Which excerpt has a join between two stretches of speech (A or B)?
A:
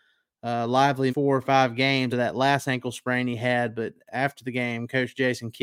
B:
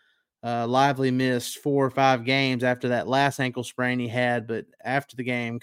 A